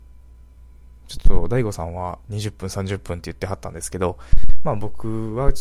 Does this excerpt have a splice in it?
no; 0 cuts

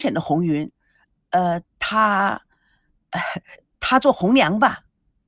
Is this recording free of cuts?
yes; 0 cuts

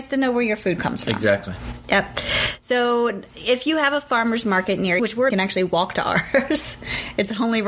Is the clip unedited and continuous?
no; 2 cuts; at 5.0 s, 5.3 s

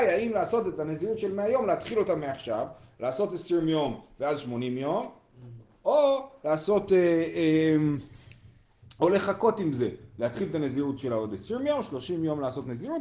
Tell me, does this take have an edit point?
no; 0 cuts

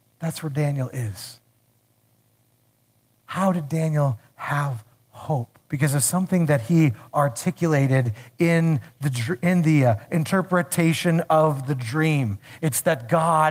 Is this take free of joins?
no; 1 cut; at 5.6 s

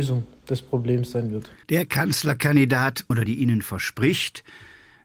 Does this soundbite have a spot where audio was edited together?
yes; 2 cuts; at 1.6 s, 3.3 s

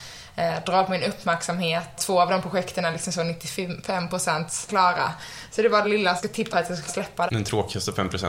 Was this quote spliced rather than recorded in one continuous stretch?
yes; 7 cuts; at 2.0 s, 4.7 s, 5.8 s, 6.2 s, 6.5 s, 6.9 s, 7.3 s

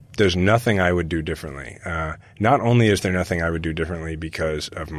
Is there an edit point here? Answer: no; 0 cuts

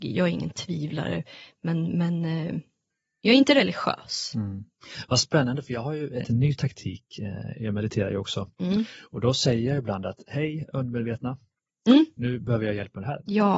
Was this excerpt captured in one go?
no; 2 cuts; at 2.9 s, 6.2 s

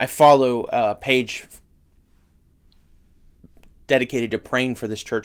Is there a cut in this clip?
no; 0 cuts

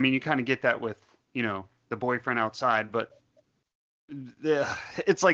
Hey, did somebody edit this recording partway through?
no; 0 cuts

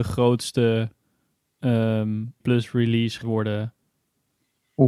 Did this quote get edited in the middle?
yes; 2 cuts; at 2.4 s, 3.2 s

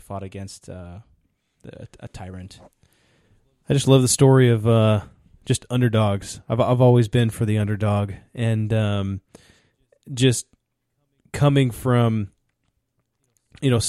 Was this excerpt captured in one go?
yes; 0 cuts

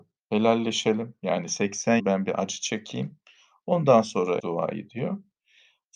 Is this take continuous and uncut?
no; 2 cuts; at 2.0 s, 4.4 s

